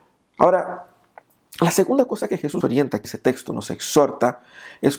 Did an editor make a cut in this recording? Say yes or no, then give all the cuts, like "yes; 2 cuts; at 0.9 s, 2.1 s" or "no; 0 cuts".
yes; 2 cuts; at 2.6 s, 3.0 s